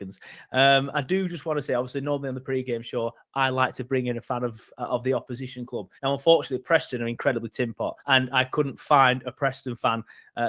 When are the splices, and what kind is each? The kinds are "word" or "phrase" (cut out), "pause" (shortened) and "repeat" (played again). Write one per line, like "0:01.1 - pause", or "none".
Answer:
0:06.0 - pause
0:08.0 - pause